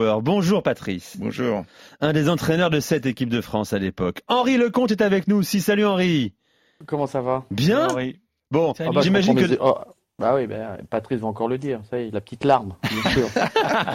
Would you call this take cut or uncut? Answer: uncut